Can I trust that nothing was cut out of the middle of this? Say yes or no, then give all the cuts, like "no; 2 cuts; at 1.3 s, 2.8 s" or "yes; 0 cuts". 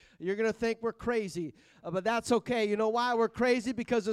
yes; 0 cuts